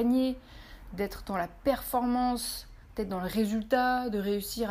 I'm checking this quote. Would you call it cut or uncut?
uncut